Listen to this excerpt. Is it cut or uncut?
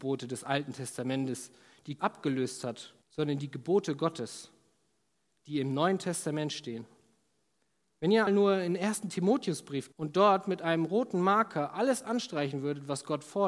cut